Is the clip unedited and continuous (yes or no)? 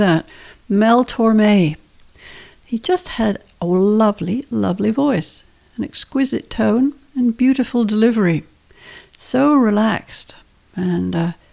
yes